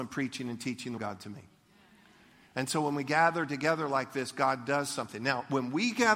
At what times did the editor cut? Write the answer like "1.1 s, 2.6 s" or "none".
1.0 s